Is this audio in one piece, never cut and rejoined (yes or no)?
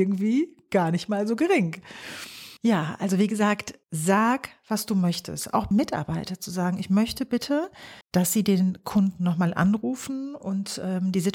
no